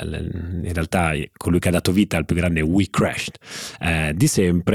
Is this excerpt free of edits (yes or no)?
yes